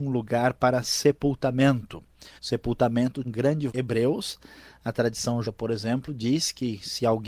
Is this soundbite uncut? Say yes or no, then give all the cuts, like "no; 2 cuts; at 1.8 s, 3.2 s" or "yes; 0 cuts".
no; 4 cuts; at 2.4 s, 3.2 s, 3.7 s, 5.4 s